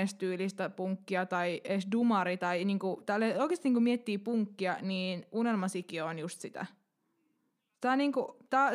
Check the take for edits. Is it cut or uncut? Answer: uncut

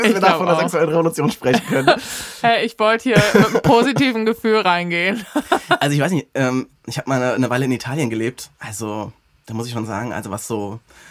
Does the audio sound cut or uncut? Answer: cut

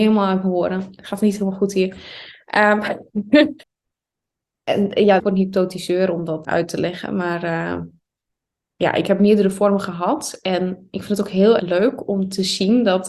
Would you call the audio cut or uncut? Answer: cut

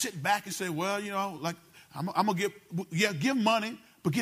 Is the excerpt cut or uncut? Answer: uncut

